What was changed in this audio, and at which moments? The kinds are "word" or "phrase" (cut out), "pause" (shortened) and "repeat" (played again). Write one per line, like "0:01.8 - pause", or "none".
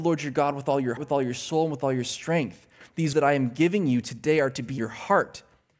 0:01.0 - word
0:03.1 - word
0:04.8 - word